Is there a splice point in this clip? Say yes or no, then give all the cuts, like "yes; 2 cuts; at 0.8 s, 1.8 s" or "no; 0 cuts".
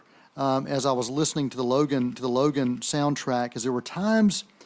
yes; 1 cut; at 2.1 s